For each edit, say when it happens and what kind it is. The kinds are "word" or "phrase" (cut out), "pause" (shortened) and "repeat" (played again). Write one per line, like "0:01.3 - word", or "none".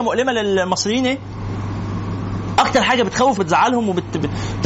0:03.4 - word